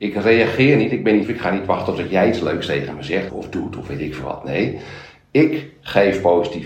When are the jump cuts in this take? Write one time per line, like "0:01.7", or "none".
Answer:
0:01.2
0:03.3